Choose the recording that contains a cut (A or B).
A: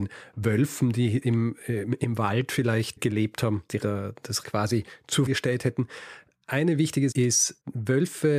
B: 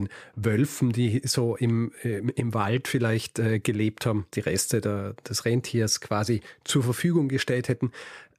A